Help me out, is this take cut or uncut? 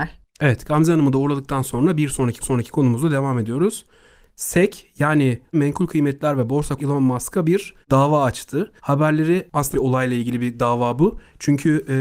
cut